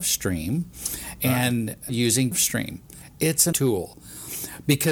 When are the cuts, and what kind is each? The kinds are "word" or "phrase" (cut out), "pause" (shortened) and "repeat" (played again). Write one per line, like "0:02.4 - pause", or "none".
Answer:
0:01.9 - word
0:02.3 - word
0:03.5 - word

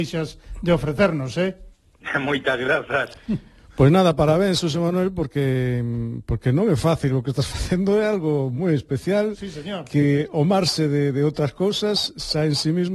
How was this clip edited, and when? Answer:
0:01.7 - pause

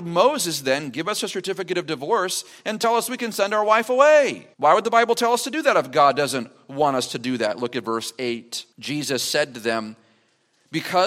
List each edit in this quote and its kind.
0:04.5 - pause
0:08.7 - pause

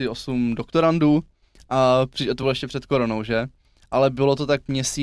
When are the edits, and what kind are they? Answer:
none

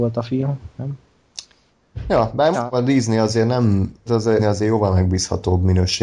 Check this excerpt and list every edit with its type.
0:02.5 - word
0:04.1 - word
0:04.4 - word

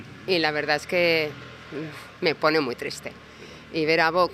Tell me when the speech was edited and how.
none

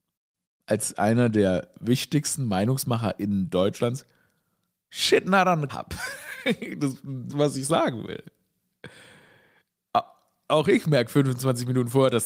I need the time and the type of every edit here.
0:05.7 - word
0:07.3 - word

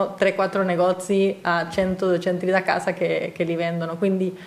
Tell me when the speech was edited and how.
0:02.4 - word

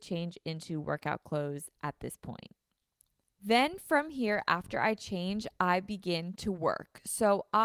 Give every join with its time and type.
none

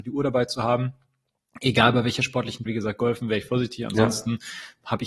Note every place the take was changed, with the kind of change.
0:02.7 - word

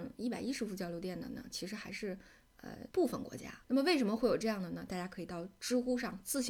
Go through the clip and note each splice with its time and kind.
0:02.9 - pause
0:03.6 - pause

